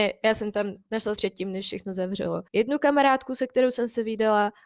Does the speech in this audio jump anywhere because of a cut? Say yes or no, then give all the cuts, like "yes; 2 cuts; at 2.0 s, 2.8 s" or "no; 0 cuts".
yes; 2 cuts; at 1.1 s, 2.5 s